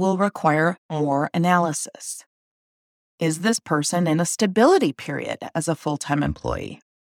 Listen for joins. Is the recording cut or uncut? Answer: uncut